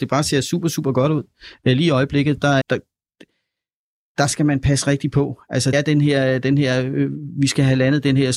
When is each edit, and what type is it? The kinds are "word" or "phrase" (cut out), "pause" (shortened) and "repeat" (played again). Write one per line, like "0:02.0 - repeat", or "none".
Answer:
0:02.6 - word
0:05.7 - word